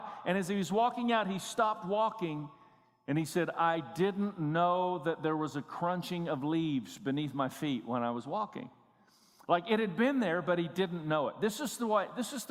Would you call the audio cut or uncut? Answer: uncut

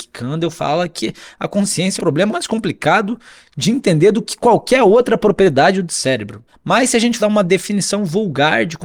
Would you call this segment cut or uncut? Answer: cut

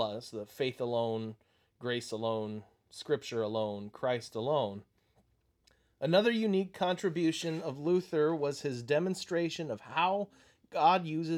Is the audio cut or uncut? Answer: uncut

